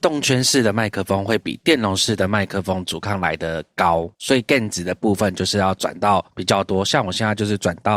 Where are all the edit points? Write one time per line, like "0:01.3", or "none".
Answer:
0:04.1
0:06.3